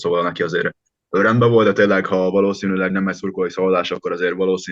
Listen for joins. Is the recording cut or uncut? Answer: cut